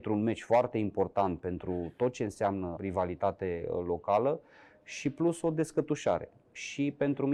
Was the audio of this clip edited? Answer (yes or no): yes